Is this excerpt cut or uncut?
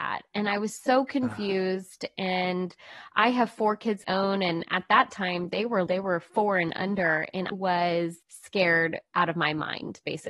cut